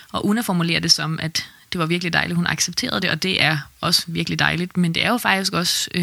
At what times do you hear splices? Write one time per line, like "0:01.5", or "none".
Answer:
none